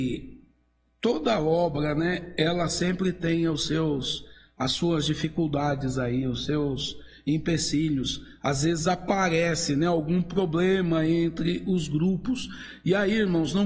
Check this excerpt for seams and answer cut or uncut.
uncut